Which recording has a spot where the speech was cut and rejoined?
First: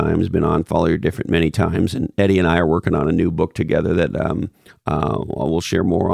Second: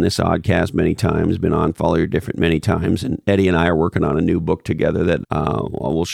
second; 1 cut; at 5.2 s

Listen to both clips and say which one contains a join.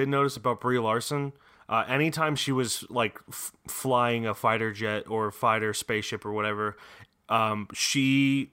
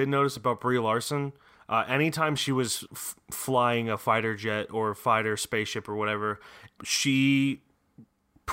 second; 2 cuts; at 2.9 s, 6.8 s

